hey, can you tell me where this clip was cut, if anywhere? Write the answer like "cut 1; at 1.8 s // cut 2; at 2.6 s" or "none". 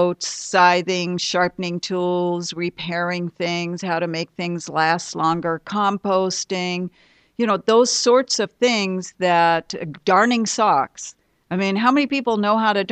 none